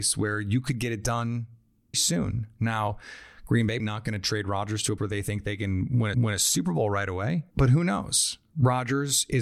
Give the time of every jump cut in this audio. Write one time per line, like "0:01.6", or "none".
0:01.9
0:03.8
0:05.0
0:06.1
0:07.5